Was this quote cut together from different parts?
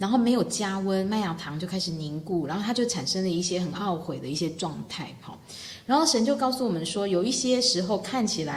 no; 0 cuts

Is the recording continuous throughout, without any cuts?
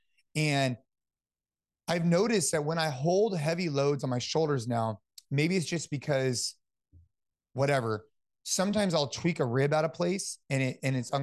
yes; 0 cuts

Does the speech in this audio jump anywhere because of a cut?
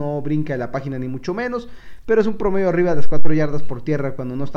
no; 0 cuts

